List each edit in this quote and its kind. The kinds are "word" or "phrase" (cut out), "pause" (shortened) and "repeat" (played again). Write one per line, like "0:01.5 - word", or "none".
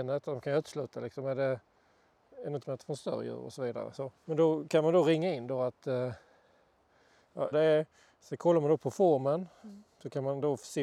0:02.6 - phrase
0:04.2 - pause
0:07.5 - word